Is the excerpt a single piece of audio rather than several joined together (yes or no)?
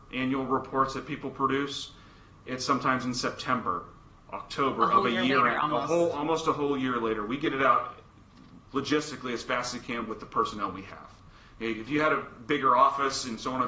no